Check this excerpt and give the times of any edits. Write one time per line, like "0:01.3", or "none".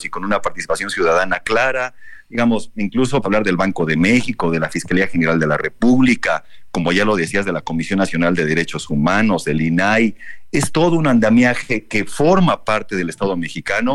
0:03.2